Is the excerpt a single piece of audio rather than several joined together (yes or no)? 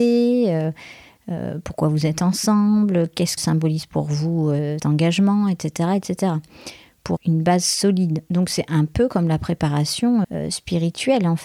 no